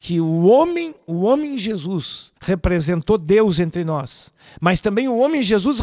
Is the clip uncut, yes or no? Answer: no